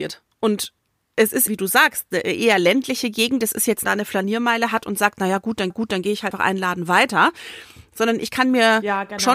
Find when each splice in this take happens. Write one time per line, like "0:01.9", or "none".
0:01.5
0:03.8
0:05.7
0:06.3